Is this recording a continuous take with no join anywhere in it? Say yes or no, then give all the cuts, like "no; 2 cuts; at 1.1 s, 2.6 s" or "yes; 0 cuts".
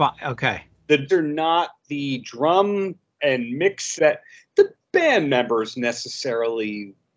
no; 3 cuts; at 1.1 s, 3.2 s, 4.0 s